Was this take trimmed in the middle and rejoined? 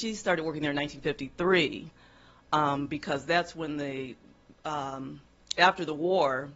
no; 0 cuts

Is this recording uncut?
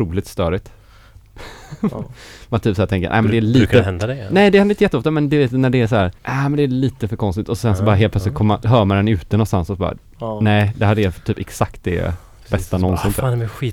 no; 1 cut; at 6.2 s

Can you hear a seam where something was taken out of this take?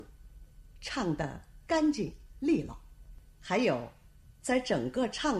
no; 0 cuts

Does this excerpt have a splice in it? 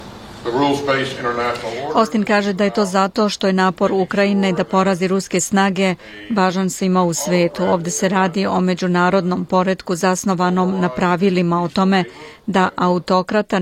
no; 0 cuts

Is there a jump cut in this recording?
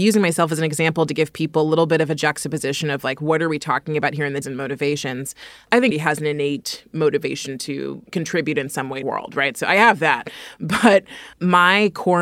yes; 3 cuts; at 4.4 s, 5.9 s, 9.0 s

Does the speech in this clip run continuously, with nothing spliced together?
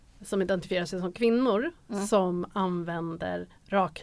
yes; 0 cuts

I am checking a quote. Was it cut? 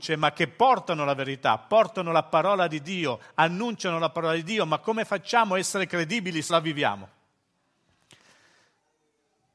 yes; 1 cut; at 6.5 s

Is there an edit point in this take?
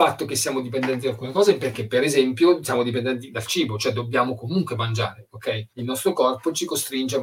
yes; 1 cut; at 5.7 s

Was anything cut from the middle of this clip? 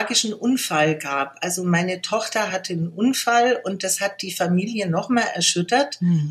no; 0 cuts

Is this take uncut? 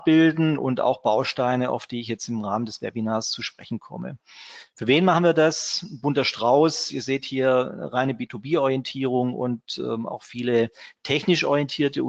yes; 0 cuts

